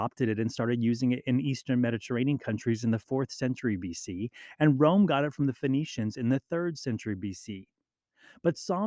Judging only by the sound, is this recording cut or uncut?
uncut